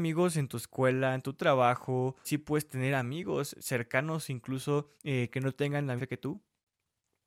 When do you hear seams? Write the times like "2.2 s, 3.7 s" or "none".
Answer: 2.2 s, 5.0 s, 6.0 s